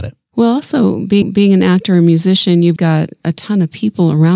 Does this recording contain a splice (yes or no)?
yes